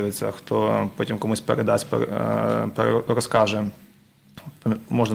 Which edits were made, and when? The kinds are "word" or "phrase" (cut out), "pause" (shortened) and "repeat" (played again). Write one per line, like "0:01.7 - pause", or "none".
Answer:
none